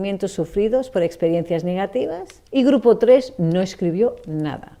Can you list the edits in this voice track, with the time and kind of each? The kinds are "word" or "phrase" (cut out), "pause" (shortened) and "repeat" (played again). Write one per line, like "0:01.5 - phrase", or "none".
0:02.5 - pause